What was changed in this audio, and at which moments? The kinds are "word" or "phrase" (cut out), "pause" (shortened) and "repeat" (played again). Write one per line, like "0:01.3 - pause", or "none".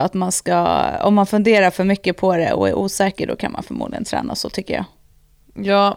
none